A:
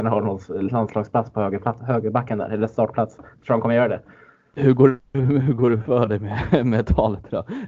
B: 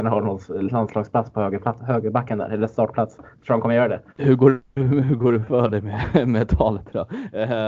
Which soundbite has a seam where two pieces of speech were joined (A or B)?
B